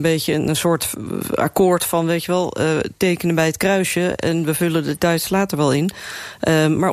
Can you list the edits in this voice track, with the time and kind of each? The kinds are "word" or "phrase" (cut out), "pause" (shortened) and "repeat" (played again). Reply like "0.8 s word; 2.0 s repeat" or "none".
5.0 s word